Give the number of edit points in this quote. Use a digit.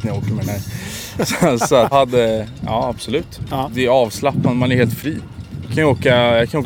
1